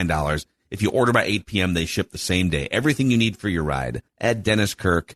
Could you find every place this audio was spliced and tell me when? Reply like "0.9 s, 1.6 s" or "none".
4.1 s